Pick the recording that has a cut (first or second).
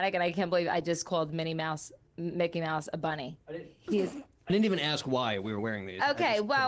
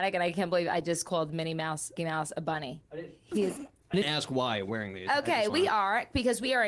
second